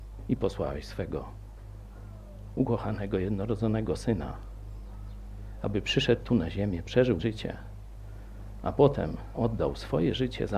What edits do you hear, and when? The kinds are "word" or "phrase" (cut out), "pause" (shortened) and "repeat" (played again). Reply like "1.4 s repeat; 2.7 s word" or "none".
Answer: 7.2 s word; 9.3 s word